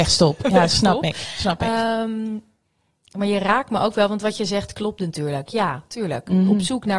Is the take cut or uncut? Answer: uncut